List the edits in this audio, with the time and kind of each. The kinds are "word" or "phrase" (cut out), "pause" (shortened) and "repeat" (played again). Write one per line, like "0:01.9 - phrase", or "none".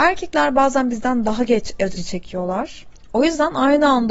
0:02.0 - word